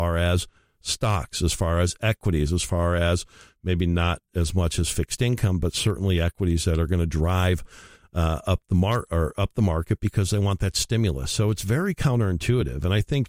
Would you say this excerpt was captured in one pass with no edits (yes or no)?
yes